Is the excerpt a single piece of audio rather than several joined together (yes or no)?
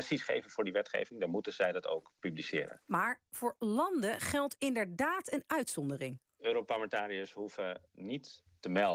yes